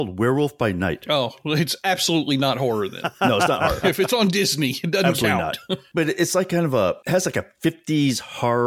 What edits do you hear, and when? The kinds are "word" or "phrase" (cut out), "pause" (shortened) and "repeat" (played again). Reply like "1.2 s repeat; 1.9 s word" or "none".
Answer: none